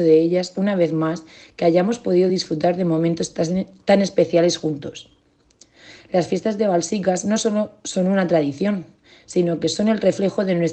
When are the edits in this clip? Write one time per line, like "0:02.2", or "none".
none